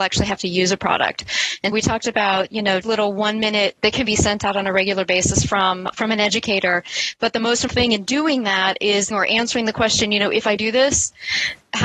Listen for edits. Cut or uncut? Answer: cut